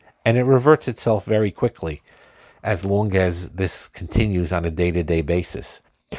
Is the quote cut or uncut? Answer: uncut